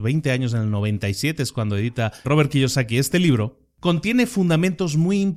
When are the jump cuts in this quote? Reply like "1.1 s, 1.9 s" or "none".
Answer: 2.2 s